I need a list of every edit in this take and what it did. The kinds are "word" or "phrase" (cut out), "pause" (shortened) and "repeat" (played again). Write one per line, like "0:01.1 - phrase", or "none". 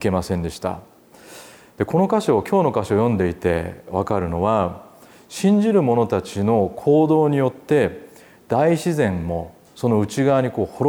none